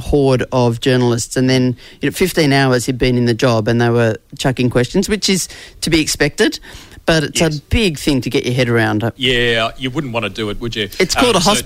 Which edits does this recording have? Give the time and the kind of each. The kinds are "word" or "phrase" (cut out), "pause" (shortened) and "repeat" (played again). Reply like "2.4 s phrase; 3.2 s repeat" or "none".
none